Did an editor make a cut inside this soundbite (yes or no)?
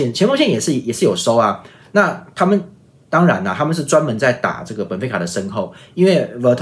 no